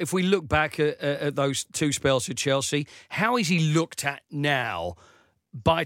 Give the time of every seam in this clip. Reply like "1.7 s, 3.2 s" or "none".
1.7 s